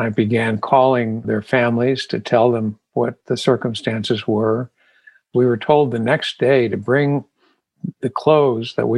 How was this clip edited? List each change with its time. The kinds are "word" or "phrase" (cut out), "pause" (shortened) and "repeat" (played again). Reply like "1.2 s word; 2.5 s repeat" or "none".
1.2 s word